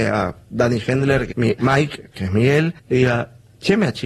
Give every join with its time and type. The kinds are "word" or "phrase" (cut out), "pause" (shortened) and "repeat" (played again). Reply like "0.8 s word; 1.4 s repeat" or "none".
1.3 s word; 2.8 s pause